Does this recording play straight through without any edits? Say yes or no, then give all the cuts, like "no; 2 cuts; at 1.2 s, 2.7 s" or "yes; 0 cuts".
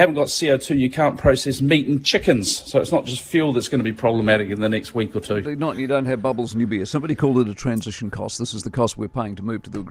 yes; 0 cuts